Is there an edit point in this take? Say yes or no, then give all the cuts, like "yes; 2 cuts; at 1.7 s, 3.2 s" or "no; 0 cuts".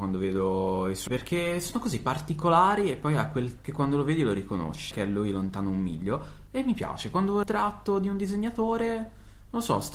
yes; 4 cuts; at 1.1 s, 3.6 s, 4.9 s, 7.4 s